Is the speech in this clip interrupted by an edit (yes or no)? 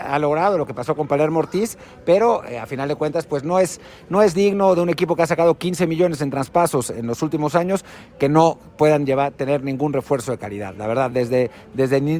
no